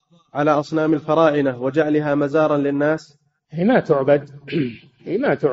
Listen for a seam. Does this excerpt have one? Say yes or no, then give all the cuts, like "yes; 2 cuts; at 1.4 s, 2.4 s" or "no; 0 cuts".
no; 0 cuts